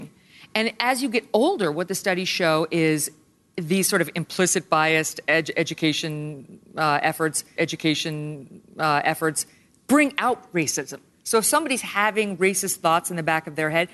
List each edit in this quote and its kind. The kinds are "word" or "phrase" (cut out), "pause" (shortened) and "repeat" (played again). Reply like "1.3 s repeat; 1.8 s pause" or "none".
7.6 s repeat